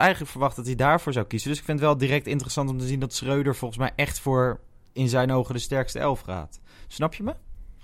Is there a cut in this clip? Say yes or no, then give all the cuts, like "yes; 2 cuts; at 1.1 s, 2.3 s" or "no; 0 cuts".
no; 0 cuts